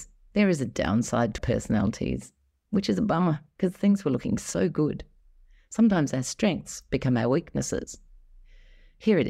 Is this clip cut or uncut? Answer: cut